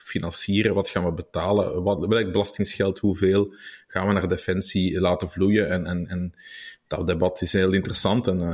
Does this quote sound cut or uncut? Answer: uncut